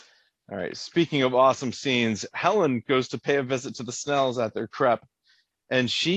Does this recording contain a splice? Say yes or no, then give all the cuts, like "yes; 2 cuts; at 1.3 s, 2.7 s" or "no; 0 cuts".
no; 0 cuts